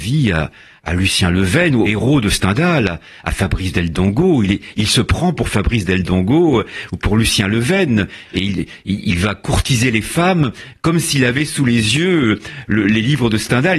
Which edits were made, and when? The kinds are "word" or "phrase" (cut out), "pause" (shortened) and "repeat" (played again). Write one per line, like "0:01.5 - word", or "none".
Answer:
0:01.9 - word